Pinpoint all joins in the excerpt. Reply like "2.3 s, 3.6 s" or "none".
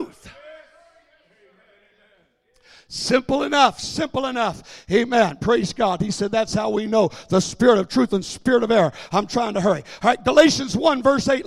none